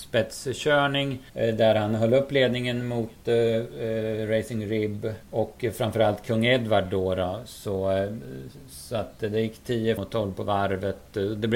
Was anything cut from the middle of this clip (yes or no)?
yes